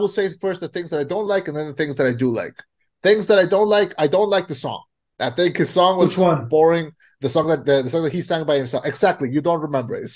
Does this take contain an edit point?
no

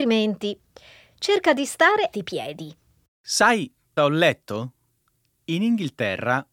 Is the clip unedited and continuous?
no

